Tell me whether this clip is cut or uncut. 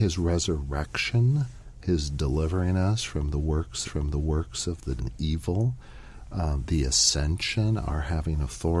cut